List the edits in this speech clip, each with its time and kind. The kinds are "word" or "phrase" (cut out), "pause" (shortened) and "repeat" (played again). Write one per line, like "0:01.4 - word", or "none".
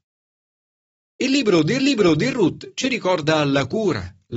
0:01.8 - repeat